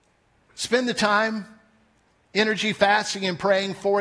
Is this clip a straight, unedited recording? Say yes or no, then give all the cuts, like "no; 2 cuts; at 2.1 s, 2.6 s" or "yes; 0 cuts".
yes; 0 cuts